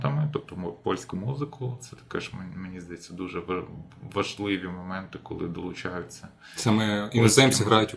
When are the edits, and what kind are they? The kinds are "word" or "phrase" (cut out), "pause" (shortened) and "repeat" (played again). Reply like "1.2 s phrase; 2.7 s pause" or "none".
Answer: 1.1 s phrase